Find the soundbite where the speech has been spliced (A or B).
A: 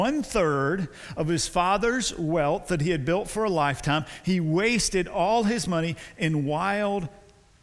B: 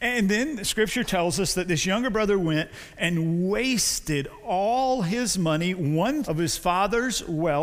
B